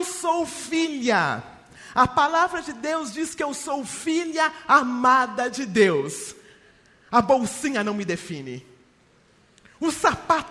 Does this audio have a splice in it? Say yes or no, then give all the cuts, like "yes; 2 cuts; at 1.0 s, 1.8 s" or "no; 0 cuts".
no; 0 cuts